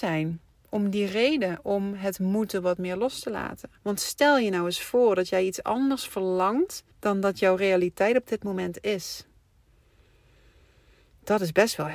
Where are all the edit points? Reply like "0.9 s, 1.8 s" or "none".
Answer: 3.8 s, 6.9 s